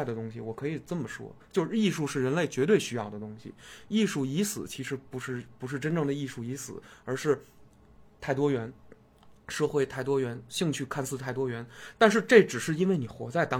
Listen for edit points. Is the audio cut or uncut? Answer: uncut